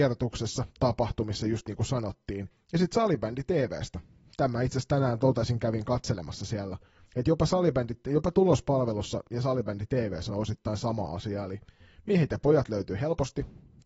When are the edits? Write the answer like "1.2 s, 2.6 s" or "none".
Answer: none